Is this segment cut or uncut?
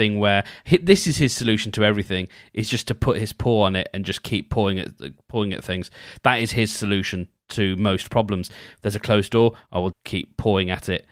cut